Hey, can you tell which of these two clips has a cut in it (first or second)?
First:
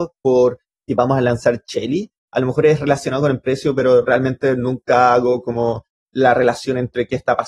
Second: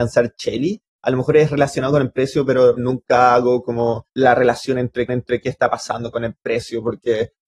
second